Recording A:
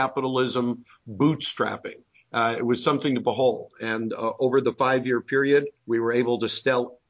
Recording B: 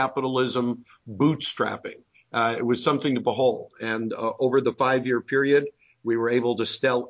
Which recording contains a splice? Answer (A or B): A